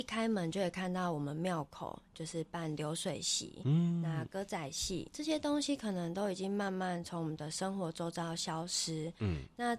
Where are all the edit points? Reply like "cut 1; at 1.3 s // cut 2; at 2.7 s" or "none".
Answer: cut 1; at 5.1 s